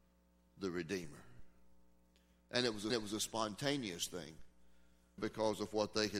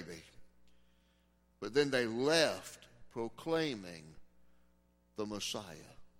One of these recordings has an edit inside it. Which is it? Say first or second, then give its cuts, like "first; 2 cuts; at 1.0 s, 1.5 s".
first; 2 cuts; at 2.9 s, 5.2 s